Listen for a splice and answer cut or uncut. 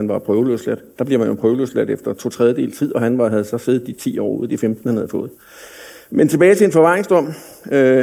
uncut